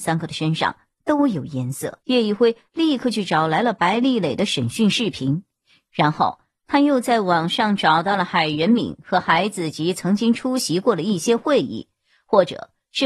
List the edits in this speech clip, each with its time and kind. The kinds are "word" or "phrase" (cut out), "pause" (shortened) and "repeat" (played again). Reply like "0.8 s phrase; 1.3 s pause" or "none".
2.0 s pause